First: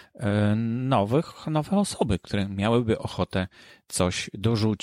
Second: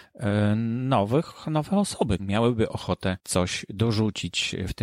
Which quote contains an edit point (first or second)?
second